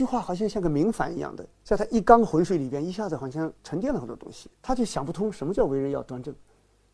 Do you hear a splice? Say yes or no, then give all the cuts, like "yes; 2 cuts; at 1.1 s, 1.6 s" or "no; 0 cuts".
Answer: yes; 2 cuts; at 1.5 s, 4.5 s